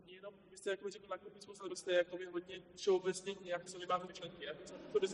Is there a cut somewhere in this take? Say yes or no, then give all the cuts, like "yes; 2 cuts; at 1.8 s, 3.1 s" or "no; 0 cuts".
yes; 4 cuts; at 1.7 s, 2.6 s, 3.7 s, 4.1 s